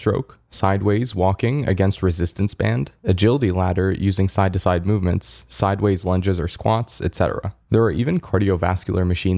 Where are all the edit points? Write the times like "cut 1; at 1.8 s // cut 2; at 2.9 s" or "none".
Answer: none